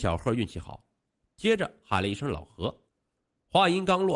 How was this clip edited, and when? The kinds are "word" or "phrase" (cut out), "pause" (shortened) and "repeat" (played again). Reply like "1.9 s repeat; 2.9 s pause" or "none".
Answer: 2.9 s pause